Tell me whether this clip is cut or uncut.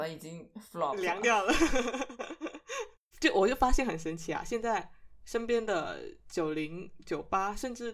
cut